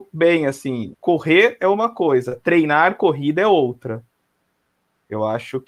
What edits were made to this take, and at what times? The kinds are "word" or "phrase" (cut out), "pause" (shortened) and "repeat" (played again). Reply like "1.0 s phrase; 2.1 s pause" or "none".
0.9 s word